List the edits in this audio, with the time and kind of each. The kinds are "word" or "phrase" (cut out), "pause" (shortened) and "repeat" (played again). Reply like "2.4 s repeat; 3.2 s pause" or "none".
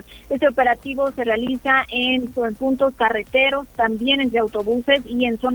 2.3 s word; 4.3 s word